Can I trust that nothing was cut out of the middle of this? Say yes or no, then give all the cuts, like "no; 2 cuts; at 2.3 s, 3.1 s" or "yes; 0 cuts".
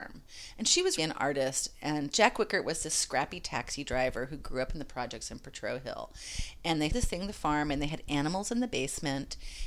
no; 2 cuts; at 1.0 s, 6.9 s